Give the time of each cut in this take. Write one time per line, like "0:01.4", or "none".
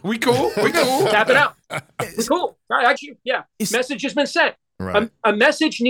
0:03.0